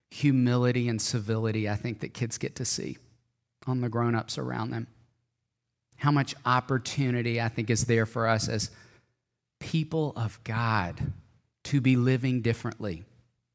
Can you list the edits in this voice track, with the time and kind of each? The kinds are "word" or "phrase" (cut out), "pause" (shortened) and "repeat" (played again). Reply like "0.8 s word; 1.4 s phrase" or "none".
none